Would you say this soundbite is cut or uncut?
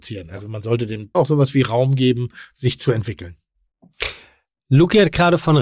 cut